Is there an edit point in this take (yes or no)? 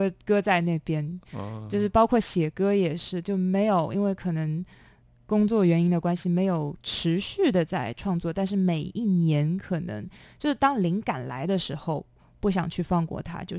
no